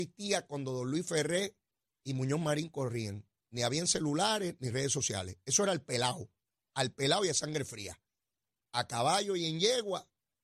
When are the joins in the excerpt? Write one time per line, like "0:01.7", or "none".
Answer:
none

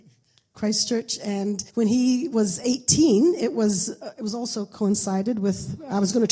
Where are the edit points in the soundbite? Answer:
0:01.7

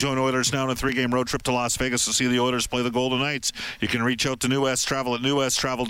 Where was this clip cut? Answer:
none

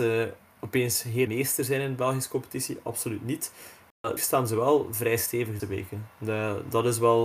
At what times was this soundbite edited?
0:01.3
0:04.2
0:05.6

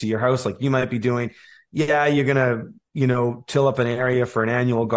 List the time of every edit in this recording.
none

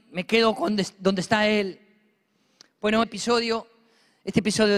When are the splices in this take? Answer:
0:03.0

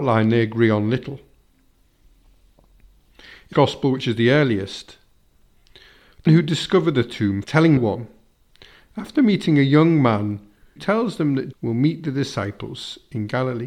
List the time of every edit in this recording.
0:03.5
0:06.3
0:07.4
0:07.8
0:10.8
0:11.5

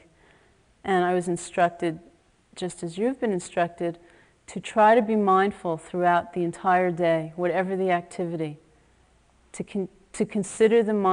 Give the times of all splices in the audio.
none

